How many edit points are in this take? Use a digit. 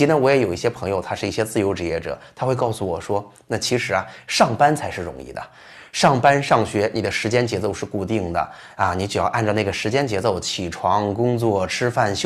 0